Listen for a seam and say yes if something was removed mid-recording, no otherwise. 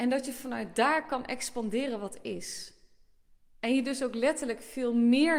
no